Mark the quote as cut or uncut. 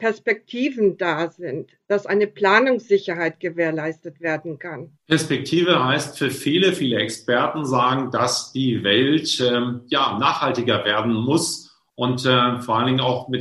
cut